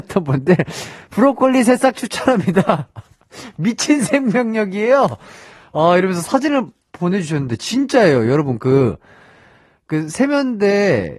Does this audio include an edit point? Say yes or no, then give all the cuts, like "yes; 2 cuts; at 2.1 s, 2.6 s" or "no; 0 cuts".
no; 0 cuts